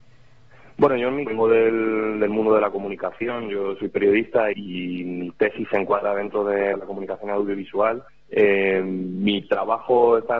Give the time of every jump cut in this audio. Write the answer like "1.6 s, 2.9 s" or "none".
1.3 s, 4.5 s, 6.7 s, 8.1 s